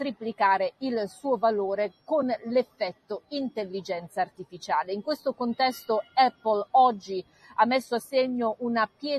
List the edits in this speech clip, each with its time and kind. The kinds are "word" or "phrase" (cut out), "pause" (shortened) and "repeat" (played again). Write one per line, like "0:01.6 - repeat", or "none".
none